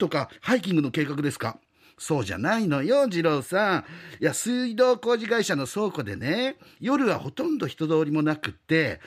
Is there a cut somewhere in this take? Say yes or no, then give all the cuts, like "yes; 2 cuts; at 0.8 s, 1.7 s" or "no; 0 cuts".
no; 0 cuts